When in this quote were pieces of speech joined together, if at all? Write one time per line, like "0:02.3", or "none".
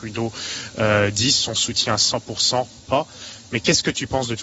0:02.8